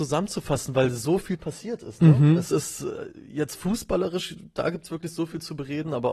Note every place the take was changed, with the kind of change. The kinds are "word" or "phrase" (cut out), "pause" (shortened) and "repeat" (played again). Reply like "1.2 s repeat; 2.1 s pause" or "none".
none

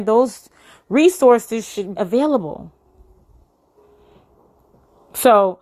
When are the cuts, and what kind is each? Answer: 2.0 s word

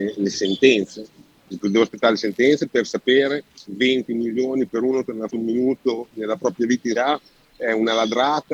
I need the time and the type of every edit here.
1.5 s word; 3.7 s word; 5.3 s word; 6.1 s pause; 7.0 s word

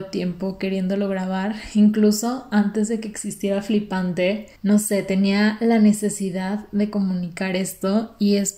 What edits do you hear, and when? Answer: 4.6 s pause

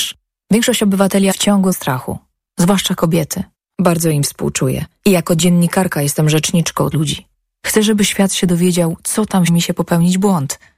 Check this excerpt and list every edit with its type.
1.3 s phrase; 1.7 s word; 3.5 s pause; 6.9 s word; 9.5 s phrase

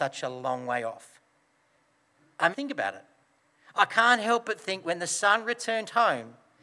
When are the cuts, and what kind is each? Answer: 2.5 s word

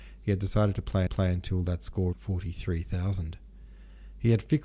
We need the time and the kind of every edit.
1.1 s repeat; 2.1 s word

